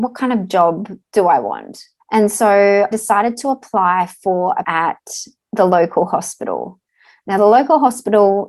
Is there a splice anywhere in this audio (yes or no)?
yes